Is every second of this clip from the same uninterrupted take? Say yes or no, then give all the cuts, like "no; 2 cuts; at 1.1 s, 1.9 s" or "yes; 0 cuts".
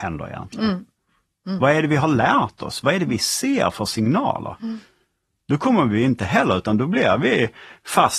yes; 0 cuts